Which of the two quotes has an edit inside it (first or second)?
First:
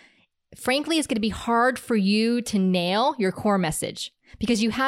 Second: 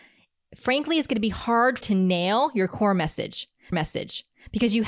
second